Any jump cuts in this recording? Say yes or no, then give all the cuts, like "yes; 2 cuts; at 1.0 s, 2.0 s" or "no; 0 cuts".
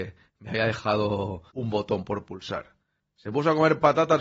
yes; 1 cut; at 1.5 s